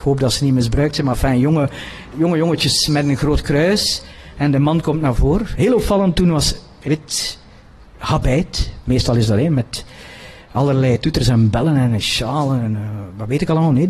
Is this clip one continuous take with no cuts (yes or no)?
no